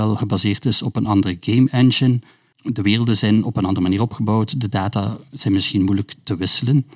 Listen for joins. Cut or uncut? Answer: uncut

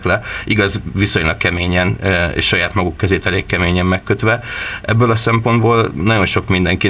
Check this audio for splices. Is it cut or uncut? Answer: uncut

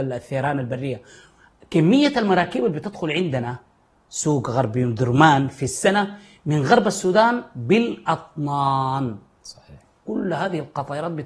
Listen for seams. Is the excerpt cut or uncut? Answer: uncut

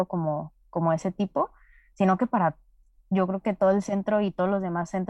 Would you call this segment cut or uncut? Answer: uncut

